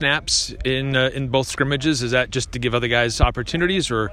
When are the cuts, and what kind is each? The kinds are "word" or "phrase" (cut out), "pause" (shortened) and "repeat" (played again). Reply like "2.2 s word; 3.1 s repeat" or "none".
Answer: none